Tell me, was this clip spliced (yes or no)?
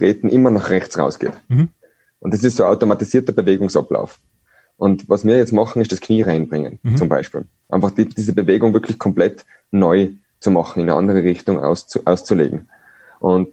no